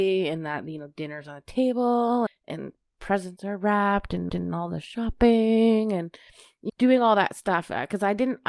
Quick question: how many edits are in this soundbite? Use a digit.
3